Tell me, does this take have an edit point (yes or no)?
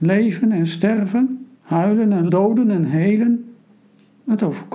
yes